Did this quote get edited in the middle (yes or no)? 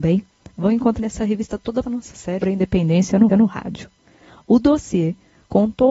yes